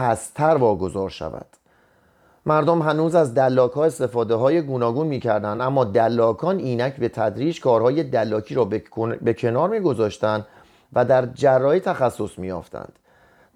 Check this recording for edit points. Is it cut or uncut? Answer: uncut